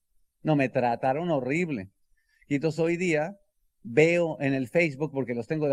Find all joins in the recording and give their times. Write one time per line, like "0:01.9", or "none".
none